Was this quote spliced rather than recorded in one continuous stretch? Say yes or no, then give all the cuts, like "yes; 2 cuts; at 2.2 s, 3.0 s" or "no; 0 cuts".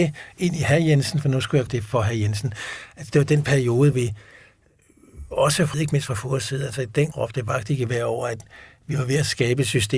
yes; 4 cuts; at 1.7 s, 3.9 s, 5.7 s, 7.1 s